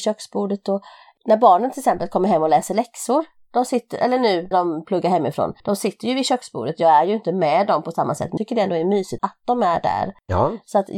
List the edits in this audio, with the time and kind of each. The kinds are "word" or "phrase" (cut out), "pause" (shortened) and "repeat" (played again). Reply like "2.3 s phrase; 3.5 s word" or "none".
4.5 s word; 5.6 s pause; 8.4 s word; 9.2 s word